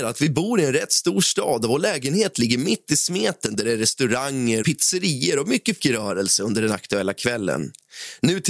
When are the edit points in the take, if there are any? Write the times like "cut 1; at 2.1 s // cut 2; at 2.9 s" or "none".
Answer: cut 1; at 4.6 s // cut 2; at 5.8 s